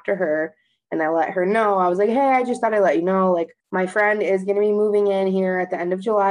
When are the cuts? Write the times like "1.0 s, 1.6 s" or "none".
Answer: 3.6 s